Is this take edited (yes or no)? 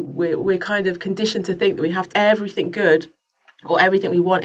yes